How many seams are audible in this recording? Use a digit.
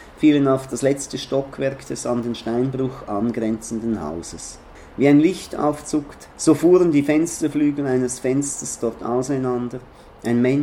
2